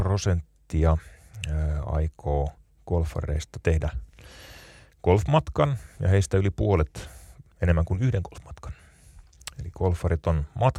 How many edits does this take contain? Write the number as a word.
one